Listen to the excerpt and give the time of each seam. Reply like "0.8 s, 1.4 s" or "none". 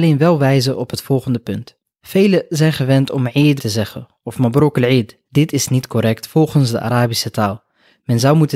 3.6 s, 5.3 s